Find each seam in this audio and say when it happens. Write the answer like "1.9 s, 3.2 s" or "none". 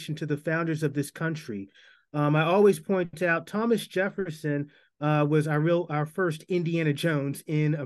none